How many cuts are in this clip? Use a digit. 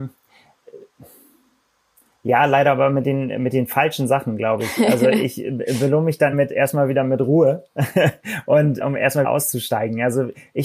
3